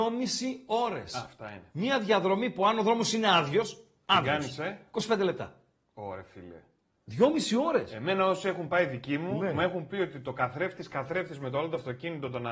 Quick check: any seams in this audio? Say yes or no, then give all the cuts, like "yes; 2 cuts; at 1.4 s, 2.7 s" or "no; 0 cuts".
no; 0 cuts